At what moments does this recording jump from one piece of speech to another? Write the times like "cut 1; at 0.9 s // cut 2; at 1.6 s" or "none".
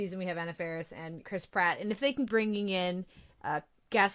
cut 1; at 1.2 s // cut 2; at 2.3 s